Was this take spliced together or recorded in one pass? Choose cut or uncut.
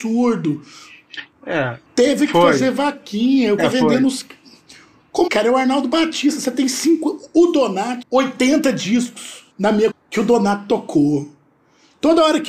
cut